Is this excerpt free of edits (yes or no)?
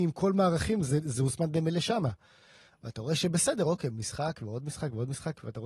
yes